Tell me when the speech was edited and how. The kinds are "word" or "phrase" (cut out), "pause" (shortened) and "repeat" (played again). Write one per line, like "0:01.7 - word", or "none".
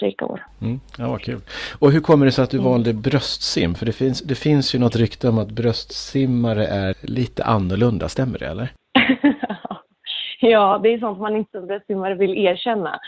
0:04.9 - word
0:06.9 - word